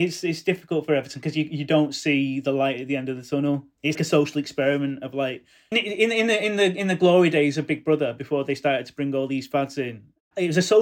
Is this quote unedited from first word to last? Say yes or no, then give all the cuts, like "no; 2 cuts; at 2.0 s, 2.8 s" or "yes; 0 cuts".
no; 2 cuts; at 3.9 s, 5.7 s